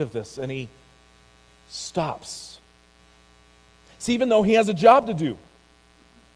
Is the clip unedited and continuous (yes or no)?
yes